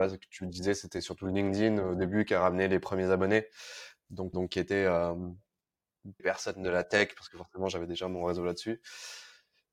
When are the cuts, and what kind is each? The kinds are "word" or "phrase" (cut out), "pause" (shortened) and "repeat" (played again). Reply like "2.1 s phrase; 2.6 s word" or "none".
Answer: 4.3 s word; 6.2 s word